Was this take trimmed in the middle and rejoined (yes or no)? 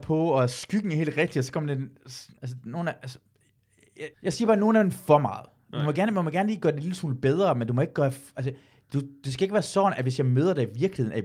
yes